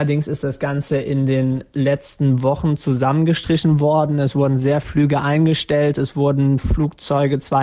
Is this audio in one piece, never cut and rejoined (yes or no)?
no